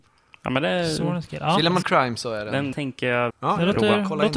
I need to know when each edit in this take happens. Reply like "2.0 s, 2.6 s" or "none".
1.8 s, 2.7 s, 3.3 s